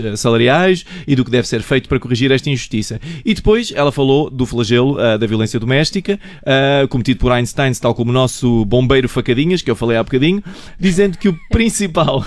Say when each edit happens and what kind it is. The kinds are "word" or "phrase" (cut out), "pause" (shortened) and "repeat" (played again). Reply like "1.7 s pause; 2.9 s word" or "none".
none